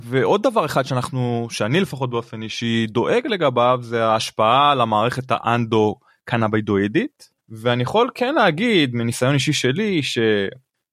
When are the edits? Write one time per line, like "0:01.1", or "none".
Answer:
0:07.4

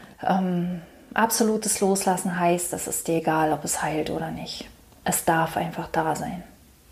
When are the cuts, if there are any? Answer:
none

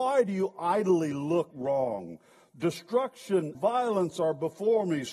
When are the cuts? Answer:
0:01.5
0:03.5

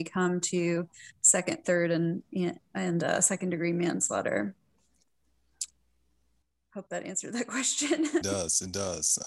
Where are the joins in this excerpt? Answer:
0:08.2

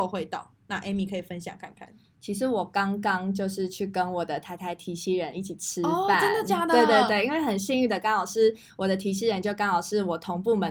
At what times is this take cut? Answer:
none

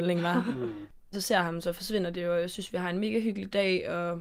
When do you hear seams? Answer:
0:01.1

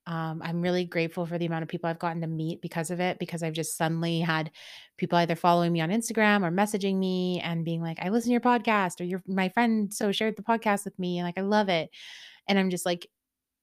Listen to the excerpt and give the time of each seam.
0:10.0

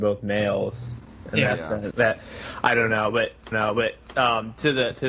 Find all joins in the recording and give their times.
0:01.9
0:03.5

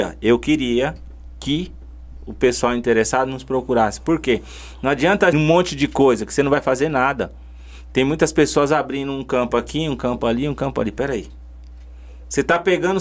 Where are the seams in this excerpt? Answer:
0:05.3

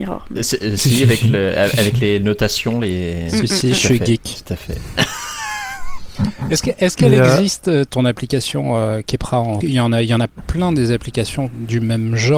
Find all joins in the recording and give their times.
0:07.9
0:09.6

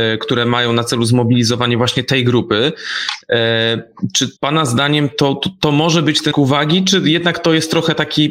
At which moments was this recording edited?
0:04.4
0:06.3

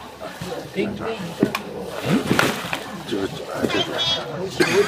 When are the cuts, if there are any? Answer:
0:03.1

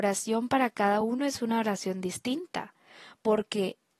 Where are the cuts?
none

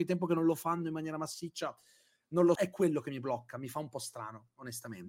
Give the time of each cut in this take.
0:02.6

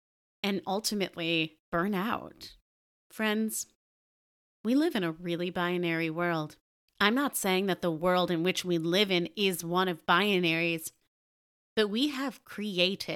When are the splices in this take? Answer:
0:01.6
0:02.8
0:06.8

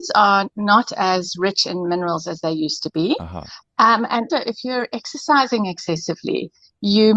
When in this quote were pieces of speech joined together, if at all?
0:04.3

